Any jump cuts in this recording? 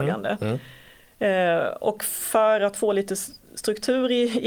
no; 0 cuts

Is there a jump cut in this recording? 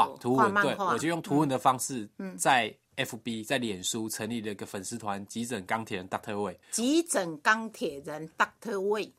yes; 1 cut; at 6.6 s

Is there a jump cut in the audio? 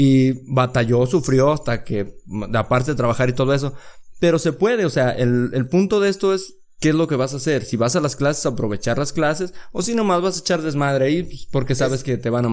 no; 0 cuts

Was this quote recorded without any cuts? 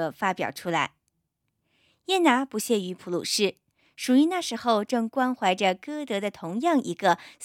yes; 0 cuts

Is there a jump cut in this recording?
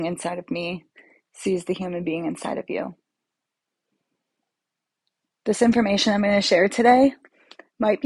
no; 0 cuts

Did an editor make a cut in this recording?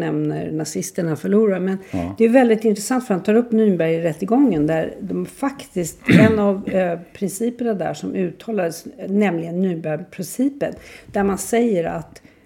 no; 0 cuts

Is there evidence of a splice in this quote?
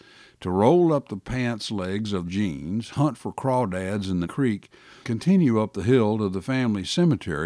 yes; 3 cuts; at 2.2 s, 4.2 s, 5.0 s

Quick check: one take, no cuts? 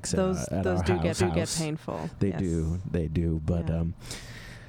no; 1 cut; at 1.2 s

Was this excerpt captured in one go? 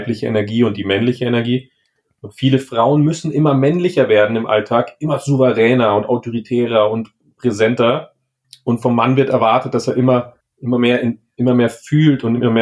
no; 2 cuts; at 8.4 s, 10.4 s

